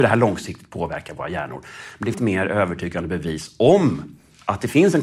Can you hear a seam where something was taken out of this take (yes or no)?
yes